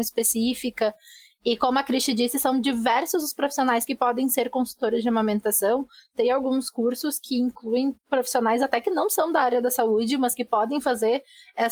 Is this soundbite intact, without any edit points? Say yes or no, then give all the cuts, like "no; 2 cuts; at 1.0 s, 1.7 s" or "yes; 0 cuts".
yes; 0 cuts